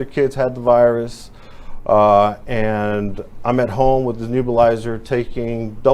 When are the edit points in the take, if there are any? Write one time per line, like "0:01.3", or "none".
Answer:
none